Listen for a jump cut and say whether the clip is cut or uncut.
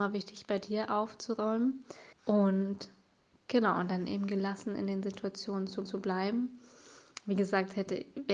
cut